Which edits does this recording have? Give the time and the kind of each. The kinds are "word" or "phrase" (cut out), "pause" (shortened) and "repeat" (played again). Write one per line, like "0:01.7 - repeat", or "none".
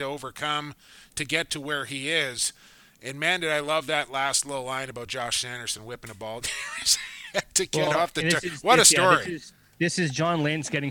none